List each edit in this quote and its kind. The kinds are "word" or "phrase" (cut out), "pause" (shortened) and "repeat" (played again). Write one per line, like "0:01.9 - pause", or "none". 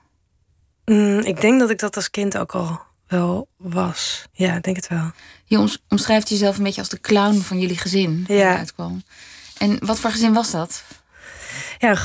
0:04.3 - pause